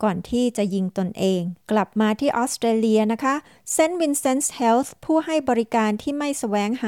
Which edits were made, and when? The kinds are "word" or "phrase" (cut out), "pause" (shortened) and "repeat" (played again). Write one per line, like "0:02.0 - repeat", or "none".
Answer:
0:01.6 - pause